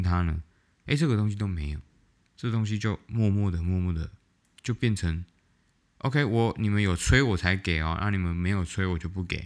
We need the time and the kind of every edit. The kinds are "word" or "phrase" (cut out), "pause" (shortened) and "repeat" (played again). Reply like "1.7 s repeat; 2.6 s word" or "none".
none

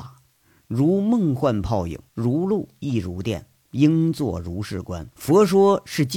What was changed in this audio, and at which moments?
2.1 s pause; 5.1 s pause

